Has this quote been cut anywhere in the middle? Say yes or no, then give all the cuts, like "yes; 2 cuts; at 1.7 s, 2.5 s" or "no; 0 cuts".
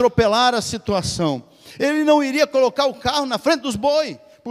no; 0 cuts